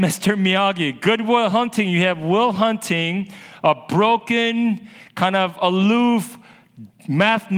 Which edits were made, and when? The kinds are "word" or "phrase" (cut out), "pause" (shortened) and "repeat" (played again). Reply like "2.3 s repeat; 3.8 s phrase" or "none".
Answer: none